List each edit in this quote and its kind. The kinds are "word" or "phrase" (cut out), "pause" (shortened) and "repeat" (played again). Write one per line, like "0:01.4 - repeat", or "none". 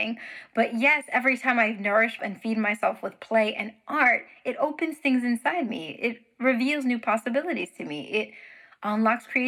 0:02.2 - word

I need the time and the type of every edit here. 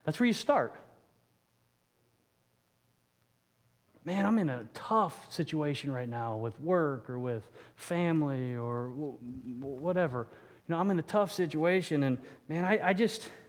none

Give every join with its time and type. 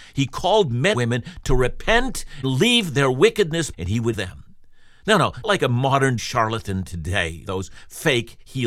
0:00.9 - word
0:02.4 - word
0:03.7 - word
0:04.1 - word
0:05.4 - word
0:06.2 - word
0:07.5 - word

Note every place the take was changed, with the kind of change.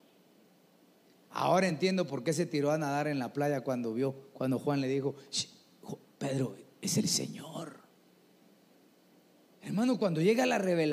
none

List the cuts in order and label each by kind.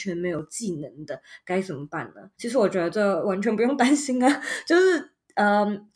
0:02.3 - pause

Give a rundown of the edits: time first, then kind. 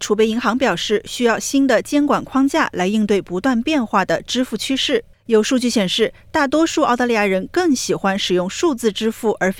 0:05.1 - pause

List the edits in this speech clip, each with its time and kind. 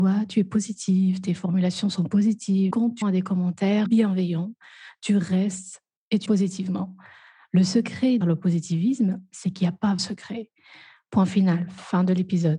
0:02.7 - word
0:03.0 - word
0:03.9 - word
0:06.3 - word
0:08.2 - word
0:10.0 - word

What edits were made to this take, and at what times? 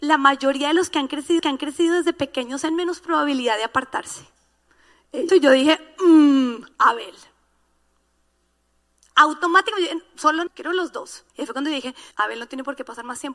0:01.4 - repeat
0:02.7 - phrase
0:05.3 - phrase
0:06.7 - pause
0:10.5 - word
0:11.3 - pause
0:12.1 - pause

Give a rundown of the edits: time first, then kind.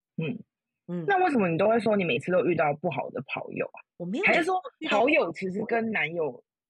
0:03.9 - pause
0:04.8 - pause

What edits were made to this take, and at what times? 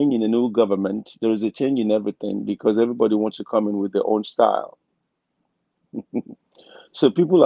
none

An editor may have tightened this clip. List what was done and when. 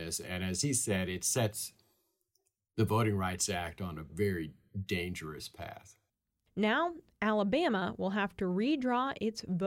none

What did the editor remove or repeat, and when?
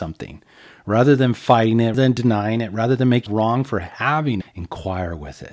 0:01.9 - word
0:03.3 - word
0:04.4 - word

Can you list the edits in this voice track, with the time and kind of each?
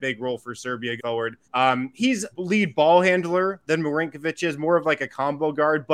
0:01.0 - word
0:01.4 - pause
0:02.3 - phrase

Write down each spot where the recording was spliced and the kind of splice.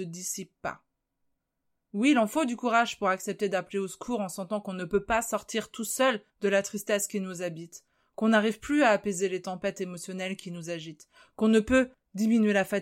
0:06.3 - pause

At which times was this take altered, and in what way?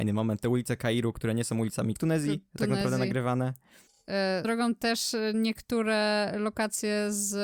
0:02.0 - phrase
0:04.4 - word

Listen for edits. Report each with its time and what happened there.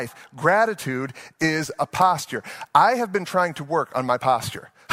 none

